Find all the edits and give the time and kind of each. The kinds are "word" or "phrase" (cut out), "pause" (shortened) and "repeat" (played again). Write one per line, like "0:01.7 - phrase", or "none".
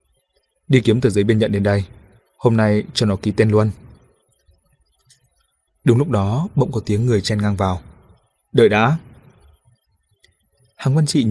none